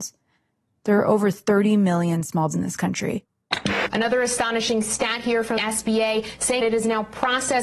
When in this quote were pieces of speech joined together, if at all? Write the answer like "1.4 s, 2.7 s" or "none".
2.5 s, 5.6 s, 6.6 s